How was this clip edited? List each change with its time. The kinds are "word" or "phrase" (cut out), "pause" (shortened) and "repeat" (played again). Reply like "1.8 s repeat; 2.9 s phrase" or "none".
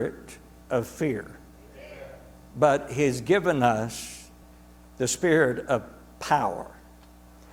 none